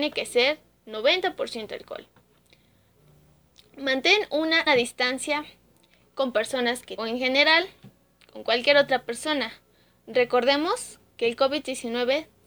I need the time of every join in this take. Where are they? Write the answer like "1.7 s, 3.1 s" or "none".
4.7 s, 7.0 s